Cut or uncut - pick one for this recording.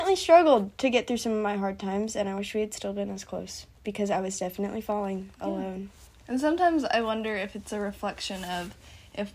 uncut